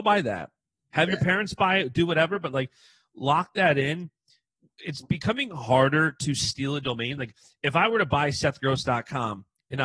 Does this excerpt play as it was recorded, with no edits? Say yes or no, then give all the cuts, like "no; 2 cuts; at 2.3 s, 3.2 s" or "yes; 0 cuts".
yes; 0 cuts